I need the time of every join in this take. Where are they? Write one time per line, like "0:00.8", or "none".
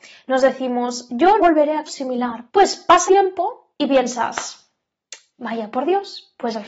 0:01.4
0:01.9
0:02.5
0:03.1
0:03.7